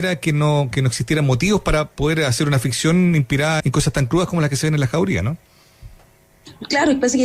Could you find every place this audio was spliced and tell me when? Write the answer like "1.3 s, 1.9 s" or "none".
3.6 s